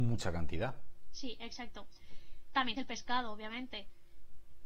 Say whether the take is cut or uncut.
cut